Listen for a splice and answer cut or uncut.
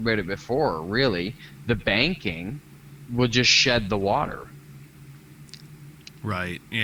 uncut